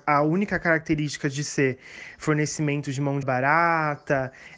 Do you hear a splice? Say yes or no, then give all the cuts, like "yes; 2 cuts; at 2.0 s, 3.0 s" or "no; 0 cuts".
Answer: yes; 1 cut; at 3.2 s